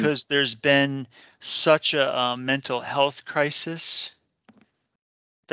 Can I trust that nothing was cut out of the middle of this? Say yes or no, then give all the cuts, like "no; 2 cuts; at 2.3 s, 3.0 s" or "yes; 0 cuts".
yes; 0 cuts